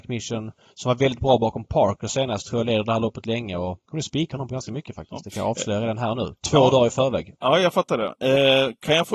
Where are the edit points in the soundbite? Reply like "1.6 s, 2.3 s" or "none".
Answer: 3.8 s